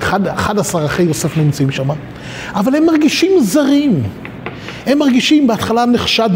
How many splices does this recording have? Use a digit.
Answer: 0